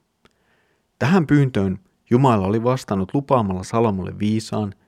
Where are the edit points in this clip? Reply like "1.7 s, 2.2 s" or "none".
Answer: none